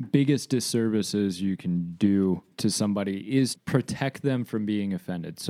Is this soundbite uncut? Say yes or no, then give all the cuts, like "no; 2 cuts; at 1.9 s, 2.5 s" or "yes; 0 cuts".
no; 2 cuts; at 2.5 s, 3.6 s